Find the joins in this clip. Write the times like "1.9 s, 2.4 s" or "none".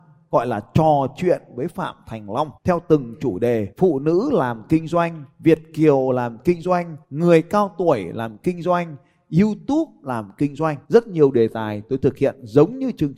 2.6 s, 3.7 s, 5.3 s, 7.0 s, 10.8 s